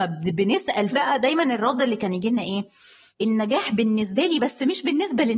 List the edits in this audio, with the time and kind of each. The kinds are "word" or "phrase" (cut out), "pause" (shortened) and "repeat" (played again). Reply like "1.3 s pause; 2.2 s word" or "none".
0.9 s word; 3.1 s pause